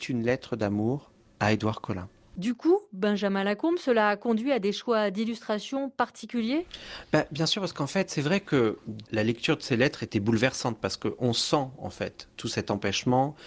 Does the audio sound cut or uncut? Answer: uncut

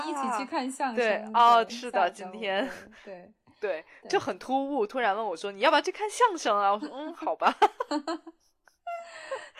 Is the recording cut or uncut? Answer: cut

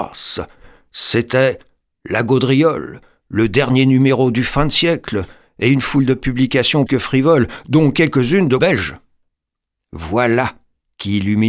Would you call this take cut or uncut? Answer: cut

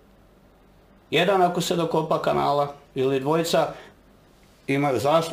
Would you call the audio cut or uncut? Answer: cut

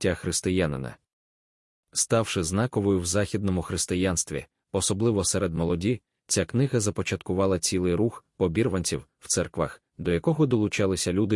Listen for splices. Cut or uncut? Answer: uncut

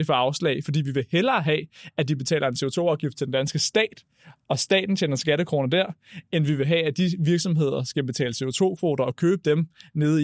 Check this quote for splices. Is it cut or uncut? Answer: uncut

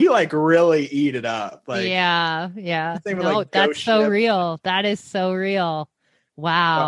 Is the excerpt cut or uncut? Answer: uncut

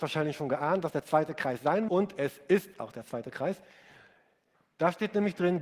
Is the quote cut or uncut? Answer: cut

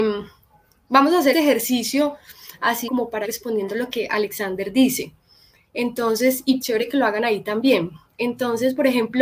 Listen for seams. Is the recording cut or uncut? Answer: cut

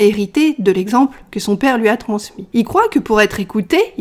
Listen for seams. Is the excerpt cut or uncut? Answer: uncut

